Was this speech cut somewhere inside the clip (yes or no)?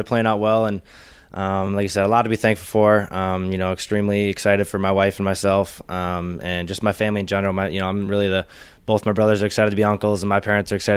no